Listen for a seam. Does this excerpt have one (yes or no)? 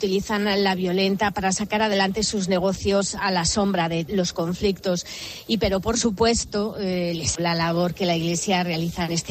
yes